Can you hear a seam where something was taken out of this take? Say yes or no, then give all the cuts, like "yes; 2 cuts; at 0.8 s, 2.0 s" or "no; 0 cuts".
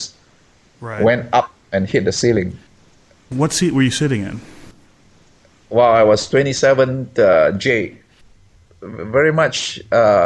no; 0 cuts